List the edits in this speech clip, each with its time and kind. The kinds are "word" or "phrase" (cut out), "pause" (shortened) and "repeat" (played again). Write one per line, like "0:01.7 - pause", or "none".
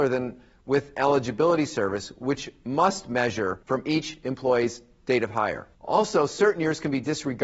0:03.6 - pause
0:05.7 - pause